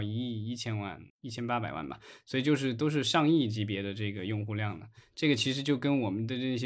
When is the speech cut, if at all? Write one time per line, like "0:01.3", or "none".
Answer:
0:01.1